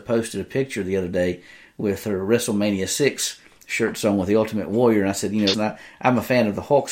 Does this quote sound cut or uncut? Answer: cut